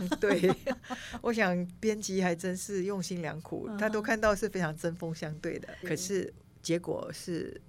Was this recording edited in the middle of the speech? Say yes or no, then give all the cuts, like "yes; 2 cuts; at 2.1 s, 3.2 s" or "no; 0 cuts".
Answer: yes; 1 cut; at 5.8 s